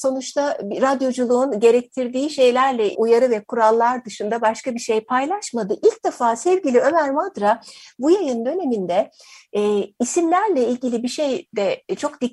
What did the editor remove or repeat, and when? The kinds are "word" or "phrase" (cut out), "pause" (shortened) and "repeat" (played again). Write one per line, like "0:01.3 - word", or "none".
0:02.9 - word